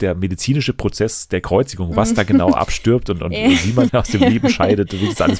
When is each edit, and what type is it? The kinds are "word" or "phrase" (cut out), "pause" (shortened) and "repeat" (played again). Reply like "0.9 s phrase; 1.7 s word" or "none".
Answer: 3.9 s word